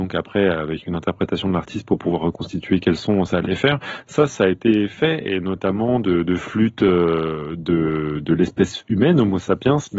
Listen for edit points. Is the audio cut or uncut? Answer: uncut